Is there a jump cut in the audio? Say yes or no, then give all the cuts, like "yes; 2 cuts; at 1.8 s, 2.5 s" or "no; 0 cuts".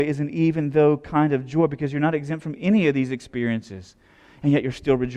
no; 0 cuts